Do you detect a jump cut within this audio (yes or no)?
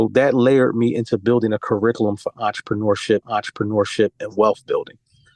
yes